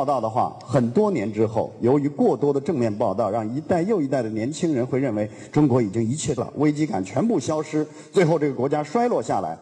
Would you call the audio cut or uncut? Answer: cut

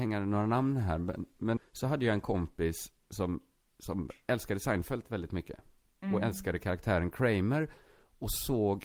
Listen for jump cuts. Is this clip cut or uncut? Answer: cut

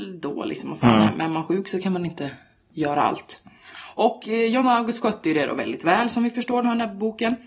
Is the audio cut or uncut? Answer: uncut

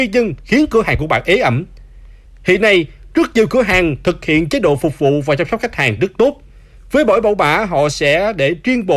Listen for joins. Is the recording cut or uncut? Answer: uncut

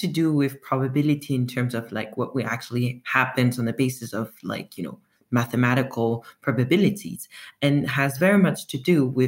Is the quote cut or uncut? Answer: uncut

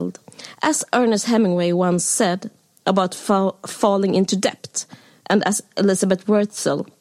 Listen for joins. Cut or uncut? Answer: uncut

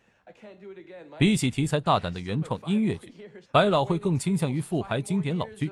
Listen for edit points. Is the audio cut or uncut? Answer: cut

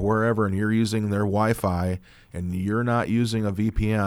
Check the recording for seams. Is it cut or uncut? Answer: uncut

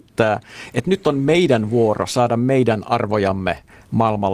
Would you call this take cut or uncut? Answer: uncut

